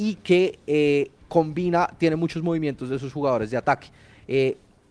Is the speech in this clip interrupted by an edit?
no; 0 cuts

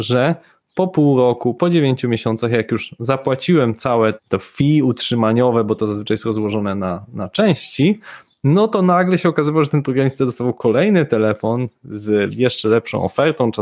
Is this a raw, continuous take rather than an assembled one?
no; 1 cut; at 4.2 s

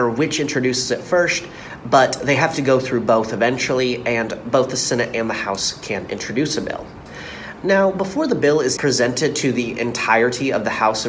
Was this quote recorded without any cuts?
no; 1 cut; at 8.8 s

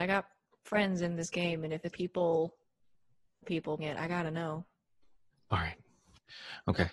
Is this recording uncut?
no; 3 cuts; at 1.9 s, 3.4 s, 3.8 s

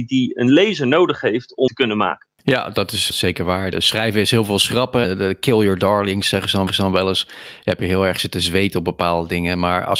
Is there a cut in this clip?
yes; 6 cuts; at 1.7 s, 2.4 s, 3.1 s, 3.7 s, 5.0 s, 6.7 s

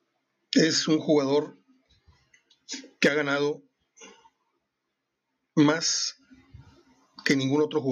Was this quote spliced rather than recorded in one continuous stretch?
no; 0 cuts

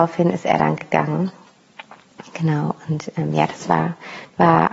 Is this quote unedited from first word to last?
yes; 0 cuts

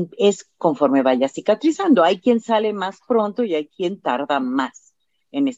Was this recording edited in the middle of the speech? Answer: no; 0 cuts

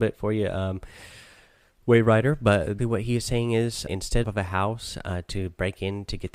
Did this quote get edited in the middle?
yes; 3 cuts; at 2.8 s, 3.9 s, 4.2 s

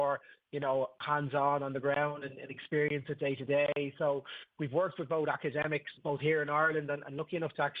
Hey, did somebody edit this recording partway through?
yes; 1 cut; at 6.0 s

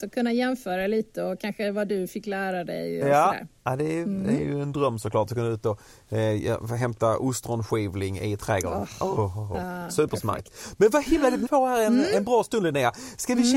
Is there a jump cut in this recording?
yes; 2 cuts; at 3.6 s, 11.4 s

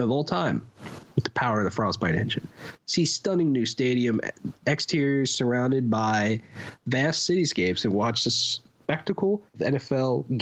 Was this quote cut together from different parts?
yes; 1 cut; at 9.5 s

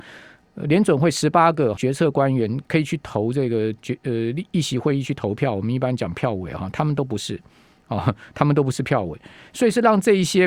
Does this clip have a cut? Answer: yes; 1 cut; at 1.8 s

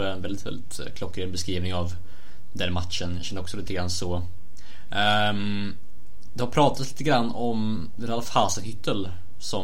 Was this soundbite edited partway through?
no; 0 cuts

